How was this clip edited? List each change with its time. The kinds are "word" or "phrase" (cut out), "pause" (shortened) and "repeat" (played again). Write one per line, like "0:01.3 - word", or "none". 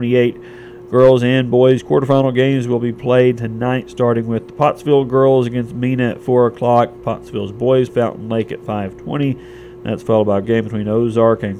0:07.9 - word
0:10.4 - word